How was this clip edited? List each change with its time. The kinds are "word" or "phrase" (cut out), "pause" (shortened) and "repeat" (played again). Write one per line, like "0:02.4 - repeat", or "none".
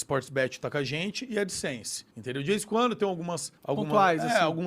0:02.1 - pause
0:03.6 - pause